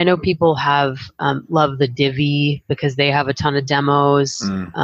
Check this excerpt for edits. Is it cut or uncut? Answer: uncut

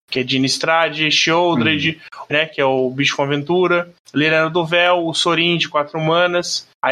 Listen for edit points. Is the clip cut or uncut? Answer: cut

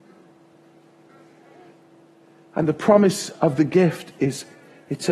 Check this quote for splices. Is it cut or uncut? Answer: uncut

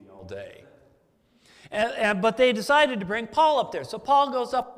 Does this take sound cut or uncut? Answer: uncut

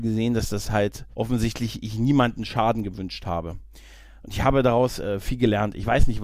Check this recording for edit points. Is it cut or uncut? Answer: cut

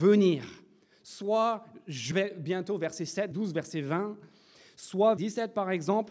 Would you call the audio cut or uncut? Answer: cut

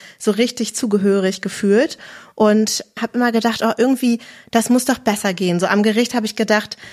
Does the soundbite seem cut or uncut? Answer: uncut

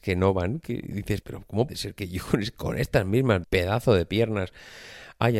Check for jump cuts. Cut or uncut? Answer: cut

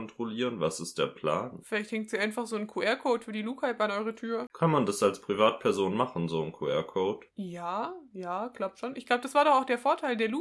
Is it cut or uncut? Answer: uncut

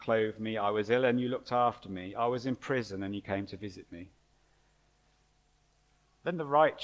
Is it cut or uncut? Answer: uncut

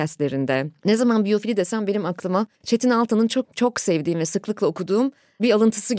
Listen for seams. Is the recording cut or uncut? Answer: cut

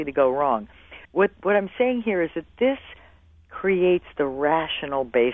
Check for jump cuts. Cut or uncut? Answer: cut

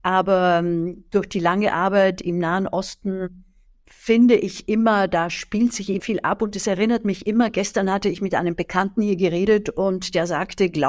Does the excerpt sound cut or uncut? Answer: cut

